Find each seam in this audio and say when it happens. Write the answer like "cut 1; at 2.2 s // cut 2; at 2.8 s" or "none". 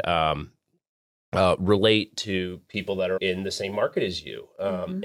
cut 1; at 3.2 s